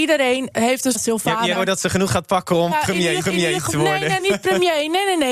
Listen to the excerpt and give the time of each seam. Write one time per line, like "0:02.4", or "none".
0:00.9
0:01.5
0:02.1
0:02.7
0:03.2
0:04.2